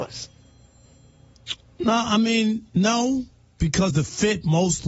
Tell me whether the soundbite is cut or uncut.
cut